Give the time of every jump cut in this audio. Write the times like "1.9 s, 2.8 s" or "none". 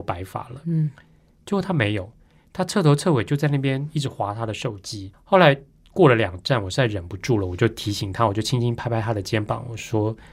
5.1 s

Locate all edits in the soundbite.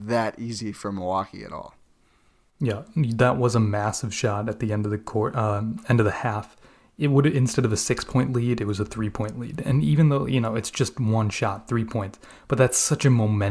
none

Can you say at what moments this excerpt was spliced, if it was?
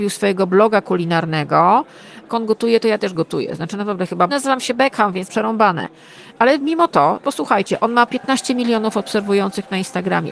2.3 s, 4.3 s, 5.3 s, 7.2 s, 8.1 s

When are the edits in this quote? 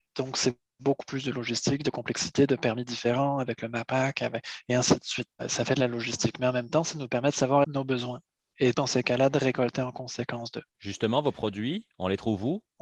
5.4 s, 7.6 s, 8.7 s, 10.7 s

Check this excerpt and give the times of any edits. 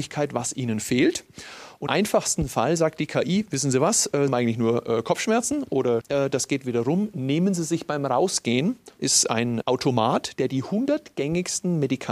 1.9 s, 4.3 s, 6.0 s, 9.0 s, 9.6 s

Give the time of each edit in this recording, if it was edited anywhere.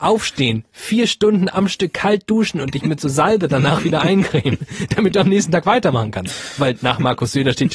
none

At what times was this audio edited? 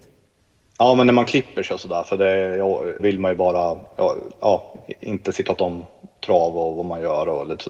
3.0 s, 5.6 s

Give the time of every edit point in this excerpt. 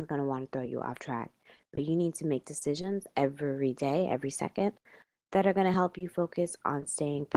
none

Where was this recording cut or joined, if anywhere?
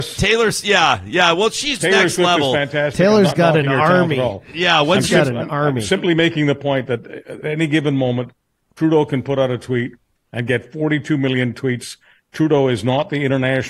1.8 s, 7.4 s

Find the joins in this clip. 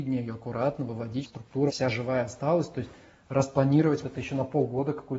1.2 s, 1.7 s, 4.0 s

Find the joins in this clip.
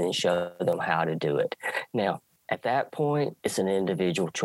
2.4 s, 3.4 s

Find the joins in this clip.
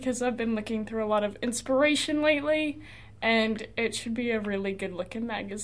none

